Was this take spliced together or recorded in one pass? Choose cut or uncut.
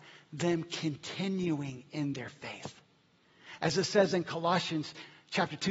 uncut